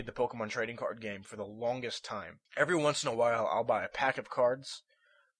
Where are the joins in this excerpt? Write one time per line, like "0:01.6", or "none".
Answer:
0:02.5

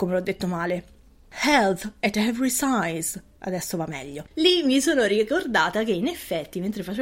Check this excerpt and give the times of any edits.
0:04.3

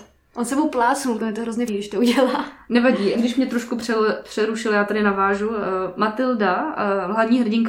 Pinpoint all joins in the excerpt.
0:01.2
0:01.7
0:03.1

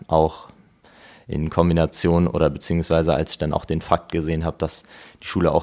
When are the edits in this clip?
none

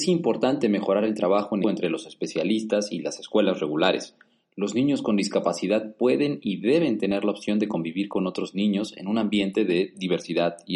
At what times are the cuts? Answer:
0:01.6

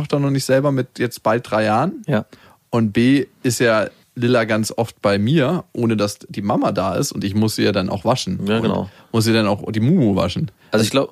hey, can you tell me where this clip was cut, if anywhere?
none

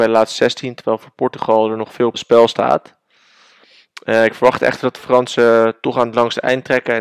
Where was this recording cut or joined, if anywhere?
0:02.1

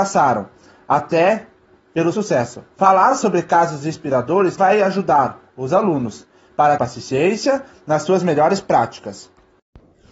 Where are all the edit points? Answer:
0:02.1
0:02.7
0:04.6
0:06.8

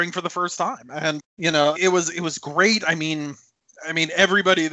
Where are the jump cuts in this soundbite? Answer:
0:01.2
0:01.8

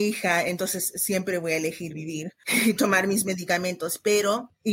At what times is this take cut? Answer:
none

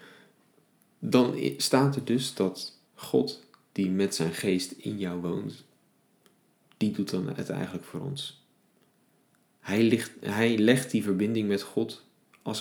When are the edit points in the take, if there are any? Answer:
0:02.9

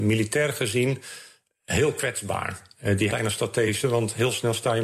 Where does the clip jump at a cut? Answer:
0:03.1
0:03.8

